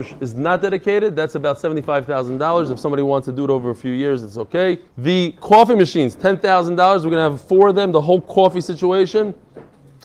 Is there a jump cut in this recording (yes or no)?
yes